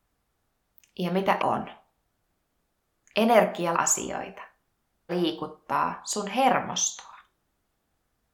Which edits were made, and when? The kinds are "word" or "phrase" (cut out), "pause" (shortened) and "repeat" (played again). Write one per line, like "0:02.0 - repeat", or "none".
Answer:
0:01.4 - word
0:03.7 - word
0:05.1 - phrase